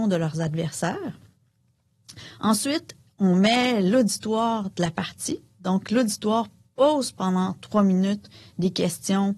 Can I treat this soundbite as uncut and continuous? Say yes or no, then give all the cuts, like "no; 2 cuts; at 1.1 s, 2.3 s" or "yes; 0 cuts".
yes; 0 cuts